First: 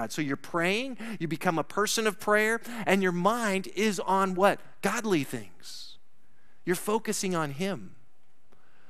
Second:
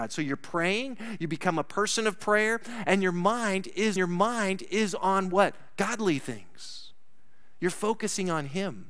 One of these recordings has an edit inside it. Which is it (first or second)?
second